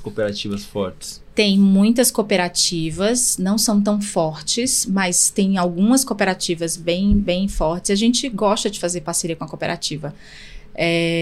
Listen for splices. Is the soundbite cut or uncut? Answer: uncut